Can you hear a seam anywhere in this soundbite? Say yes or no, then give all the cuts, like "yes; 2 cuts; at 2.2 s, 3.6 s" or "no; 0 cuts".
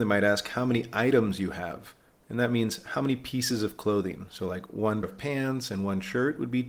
yes; 1 cut; at 5.0 s